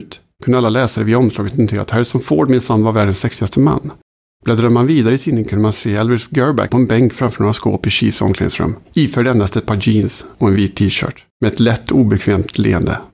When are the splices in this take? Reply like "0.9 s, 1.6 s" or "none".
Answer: 4.1 s, 6.7 s, 8.8 s, 10.3 s, 11.3 s